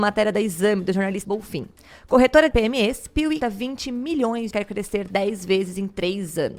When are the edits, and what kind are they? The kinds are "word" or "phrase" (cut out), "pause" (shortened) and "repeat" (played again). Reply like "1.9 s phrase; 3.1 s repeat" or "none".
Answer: 1.2 s word; 2.5 s phrase; 3.4 s word; 4.5 s phrase